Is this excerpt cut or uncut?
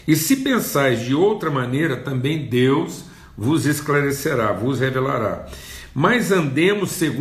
uncut